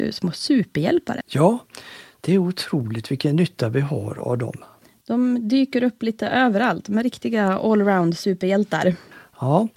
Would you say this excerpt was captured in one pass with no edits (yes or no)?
yes